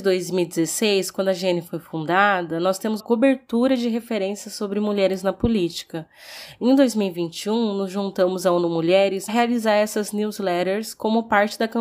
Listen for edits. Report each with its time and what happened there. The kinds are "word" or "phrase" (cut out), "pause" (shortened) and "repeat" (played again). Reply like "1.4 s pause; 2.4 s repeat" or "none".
3.0 s word; 9.3 s phrase